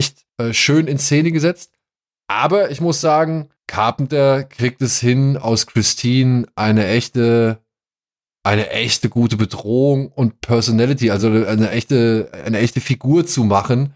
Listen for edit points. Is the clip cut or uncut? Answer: uncut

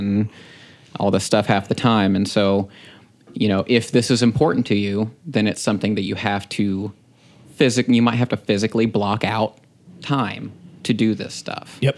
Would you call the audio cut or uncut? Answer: uncut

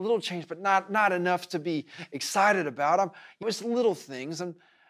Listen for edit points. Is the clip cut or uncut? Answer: cut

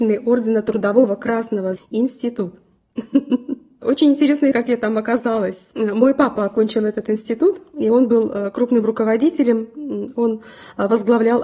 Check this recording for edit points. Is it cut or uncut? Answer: cut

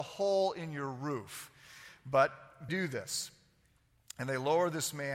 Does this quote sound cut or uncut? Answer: cut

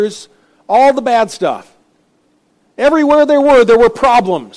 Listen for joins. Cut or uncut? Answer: uncut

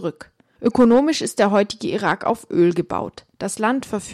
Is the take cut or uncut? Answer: uncut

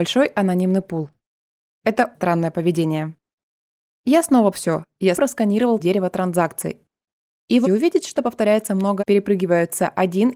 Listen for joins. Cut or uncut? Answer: cut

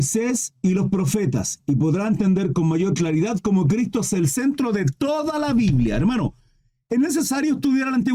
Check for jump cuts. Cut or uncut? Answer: uncut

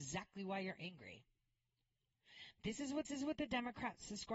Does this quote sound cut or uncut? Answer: cut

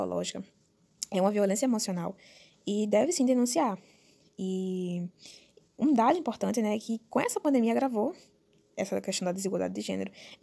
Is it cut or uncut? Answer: uncut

